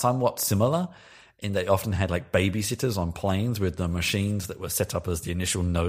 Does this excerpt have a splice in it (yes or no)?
no